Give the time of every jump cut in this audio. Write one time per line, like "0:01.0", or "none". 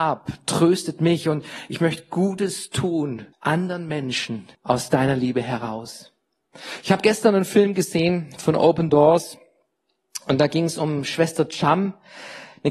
0:03.3
0:04.5